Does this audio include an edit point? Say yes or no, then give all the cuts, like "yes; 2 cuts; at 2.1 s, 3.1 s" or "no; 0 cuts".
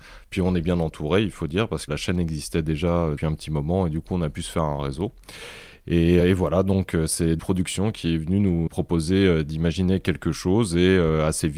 yes; 5 cuts; at 1.9 s, 3.2 s, 6.2 s, 7.4 s, 8.7 s